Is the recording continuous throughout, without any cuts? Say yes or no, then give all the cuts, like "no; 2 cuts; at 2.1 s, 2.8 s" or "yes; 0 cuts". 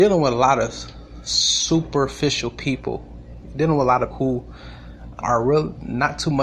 no; 2 cuts; at 4.1 s, 5.2 s